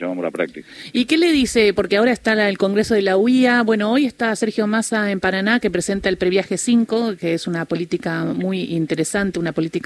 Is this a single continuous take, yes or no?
yes